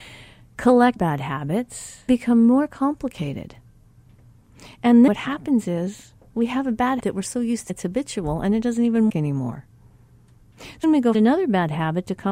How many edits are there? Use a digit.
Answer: 8